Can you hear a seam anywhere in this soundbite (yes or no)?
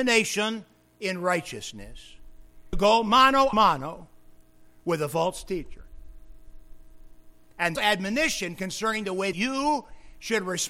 yes